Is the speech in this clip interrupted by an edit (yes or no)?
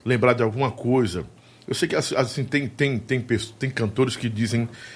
no